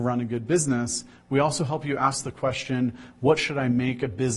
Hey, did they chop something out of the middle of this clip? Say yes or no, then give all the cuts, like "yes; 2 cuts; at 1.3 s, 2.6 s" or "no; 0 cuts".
no; 0 cuts